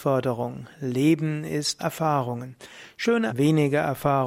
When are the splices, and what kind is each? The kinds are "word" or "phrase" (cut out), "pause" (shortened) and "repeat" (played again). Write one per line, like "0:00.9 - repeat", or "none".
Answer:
0:01.8 - word
0:03.3 - word